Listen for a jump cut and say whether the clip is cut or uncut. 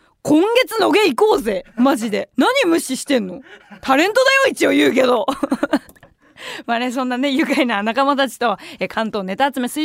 cut